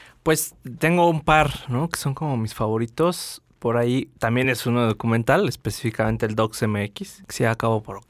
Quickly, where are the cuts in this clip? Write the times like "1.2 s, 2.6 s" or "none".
none